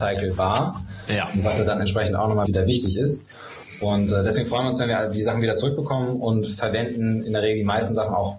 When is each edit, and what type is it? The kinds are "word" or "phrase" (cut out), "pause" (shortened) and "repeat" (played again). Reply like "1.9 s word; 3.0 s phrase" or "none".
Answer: 2.5 s word